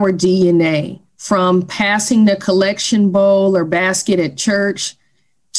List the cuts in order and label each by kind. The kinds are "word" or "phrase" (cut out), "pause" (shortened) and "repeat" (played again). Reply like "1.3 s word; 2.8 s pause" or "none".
1.1 s pause